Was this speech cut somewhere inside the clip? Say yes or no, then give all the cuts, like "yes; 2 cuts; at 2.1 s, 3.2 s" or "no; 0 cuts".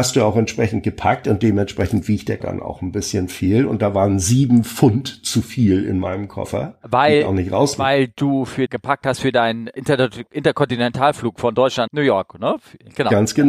yes; 4 cuts; at 2.4 s, 8.7 s, 9.8 s, 11.9 s